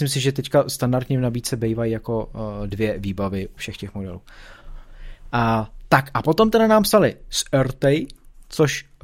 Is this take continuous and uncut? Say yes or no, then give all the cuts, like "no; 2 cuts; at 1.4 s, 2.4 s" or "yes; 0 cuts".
no; 1 cut; at 3.6 s